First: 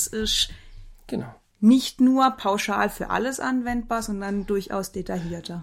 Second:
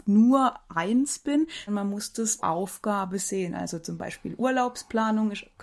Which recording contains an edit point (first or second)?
second